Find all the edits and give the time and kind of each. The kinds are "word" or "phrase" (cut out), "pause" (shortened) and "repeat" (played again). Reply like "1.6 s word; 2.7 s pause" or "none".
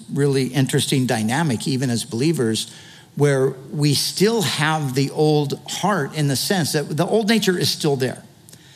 none